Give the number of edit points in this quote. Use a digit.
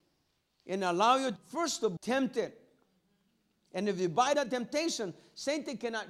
3